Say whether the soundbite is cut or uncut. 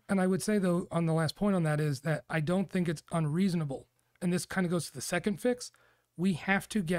uncut